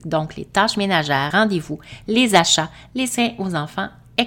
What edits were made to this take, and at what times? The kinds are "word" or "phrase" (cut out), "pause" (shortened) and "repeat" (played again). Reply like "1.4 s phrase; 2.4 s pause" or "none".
1.3 s word